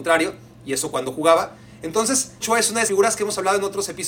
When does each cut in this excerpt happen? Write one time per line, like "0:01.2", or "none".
0:02.4
0:02.9